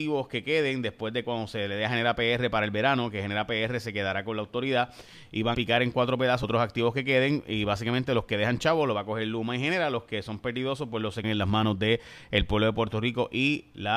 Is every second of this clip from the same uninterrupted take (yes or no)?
no